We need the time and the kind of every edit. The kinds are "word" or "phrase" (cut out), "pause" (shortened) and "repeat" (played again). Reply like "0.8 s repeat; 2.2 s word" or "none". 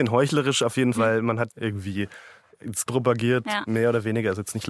0.9 s word; 1.5 s word; 2.9 s word